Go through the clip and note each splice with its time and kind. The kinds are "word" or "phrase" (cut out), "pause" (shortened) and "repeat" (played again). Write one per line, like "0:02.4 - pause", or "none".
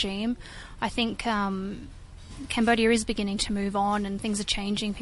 none